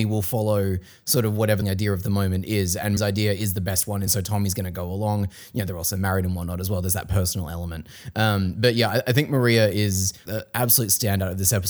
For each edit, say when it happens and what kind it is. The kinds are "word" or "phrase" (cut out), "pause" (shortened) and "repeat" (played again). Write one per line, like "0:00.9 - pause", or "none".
0:01.6 - phrase
0:03.0 - word
0:04.1 - phrase
0:10.3 - word